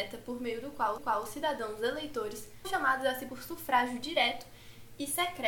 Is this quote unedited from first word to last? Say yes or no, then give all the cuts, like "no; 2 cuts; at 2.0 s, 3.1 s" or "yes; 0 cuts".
no; 3 cuts; at 1.0 s, 2.6 s, 3.3 s